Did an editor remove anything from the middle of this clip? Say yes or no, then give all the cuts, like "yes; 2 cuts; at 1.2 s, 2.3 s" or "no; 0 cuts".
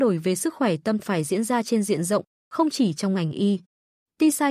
yes; 1 cut; at 1.0 s